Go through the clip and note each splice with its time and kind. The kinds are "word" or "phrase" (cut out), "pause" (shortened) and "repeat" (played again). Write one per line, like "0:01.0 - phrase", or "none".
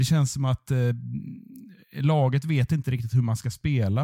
none

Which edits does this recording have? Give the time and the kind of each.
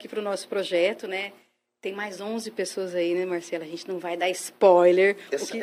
none

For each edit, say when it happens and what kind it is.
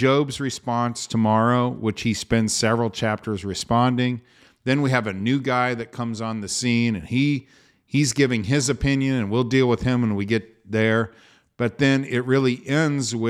none

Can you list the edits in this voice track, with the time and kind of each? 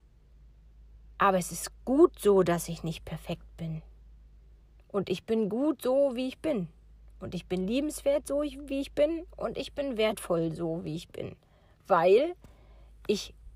none

